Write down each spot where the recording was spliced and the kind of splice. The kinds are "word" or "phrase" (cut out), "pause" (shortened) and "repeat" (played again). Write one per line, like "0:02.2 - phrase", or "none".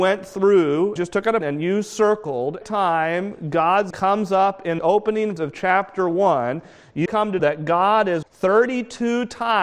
0:01.0 - word
0:01.4 - word
0:02.6 - word
0:03.9 - word
0:04.8 - word
0:05.4 - word
0:07.1 - word
0:07.4 - word
0:08.2 - word